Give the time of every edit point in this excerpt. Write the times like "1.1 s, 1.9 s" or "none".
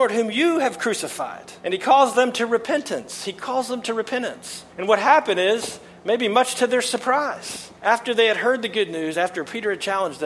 1.6 s, 4.7 s, 7.8 s